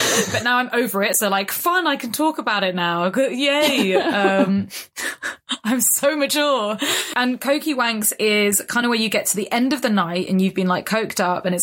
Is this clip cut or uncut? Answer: uncut